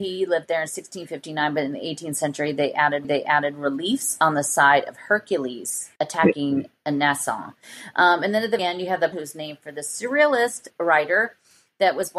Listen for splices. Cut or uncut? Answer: cut